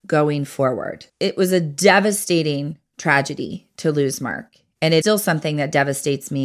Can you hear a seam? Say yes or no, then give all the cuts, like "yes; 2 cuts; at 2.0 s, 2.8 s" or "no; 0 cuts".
yes; 2 cuts; at 1.1 s, 5.0 s